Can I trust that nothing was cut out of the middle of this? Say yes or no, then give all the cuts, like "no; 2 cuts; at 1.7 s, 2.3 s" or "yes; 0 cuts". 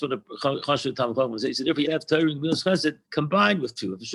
no; 2 cuts; at 1.8 s, 3.0 s